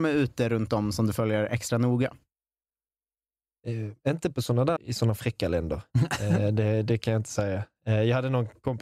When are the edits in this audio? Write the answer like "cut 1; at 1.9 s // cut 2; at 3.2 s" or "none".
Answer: cut 1; at 4.8 s